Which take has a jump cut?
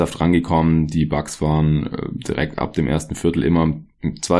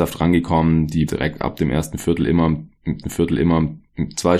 second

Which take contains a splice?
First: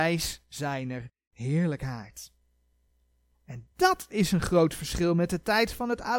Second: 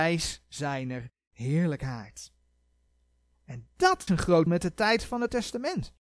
second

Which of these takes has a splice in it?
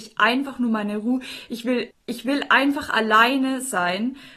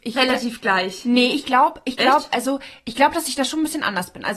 first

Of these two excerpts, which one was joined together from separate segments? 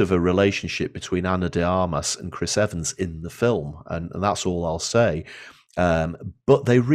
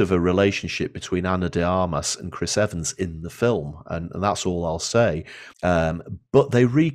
second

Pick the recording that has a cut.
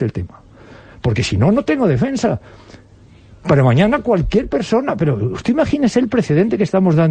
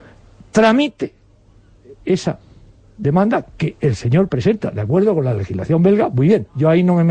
second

